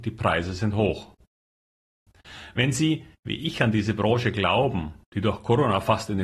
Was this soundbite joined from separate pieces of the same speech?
yes; 2 cuts; at 3.2 s, 5.0 s

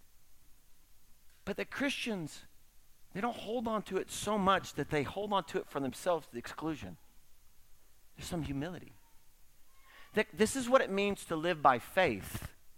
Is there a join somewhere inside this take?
no; 0 cuts

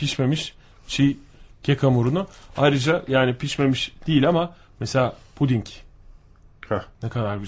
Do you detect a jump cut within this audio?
no; 0 cuts

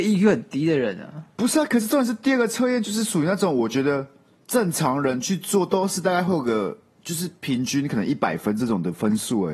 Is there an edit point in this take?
no; 0 cuts

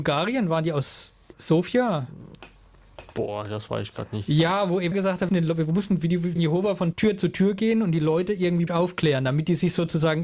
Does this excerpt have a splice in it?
yes; 6 cuts; at 1.3 s, 4.9 s, 5.3 s, 6.4 s, 6.9 s, 8.7 s

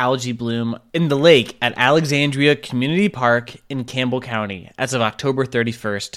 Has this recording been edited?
no; 0 cuts

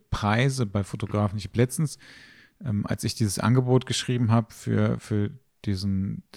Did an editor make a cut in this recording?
no; 0 cuts

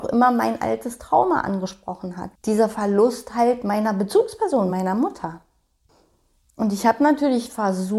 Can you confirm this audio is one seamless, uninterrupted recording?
yes; 0 cuts

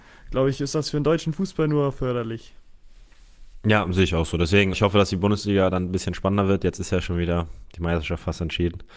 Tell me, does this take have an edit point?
yes; 1 cut; at 4.7 s

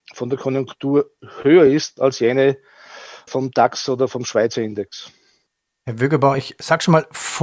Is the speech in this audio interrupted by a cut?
no; 0 cuts

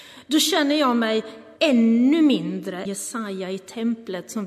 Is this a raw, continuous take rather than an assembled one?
no; 2 cuts; at 1.6 s, 2.9 s

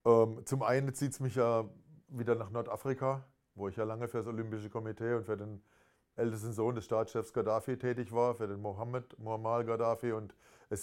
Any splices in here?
no; 0 cuts

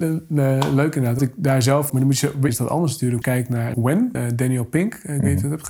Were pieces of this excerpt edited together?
yes; 6 cuts; at 1.2 s, 1.9 s, 2.5 s, 3.2 s, 3.7 s, 4.1 s

